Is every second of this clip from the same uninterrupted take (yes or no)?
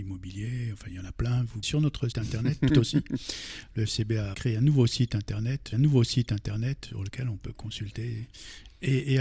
no